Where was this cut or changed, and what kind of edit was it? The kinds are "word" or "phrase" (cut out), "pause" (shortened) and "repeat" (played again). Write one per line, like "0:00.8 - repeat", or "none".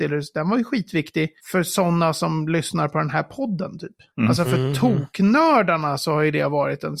0:01.4 - pause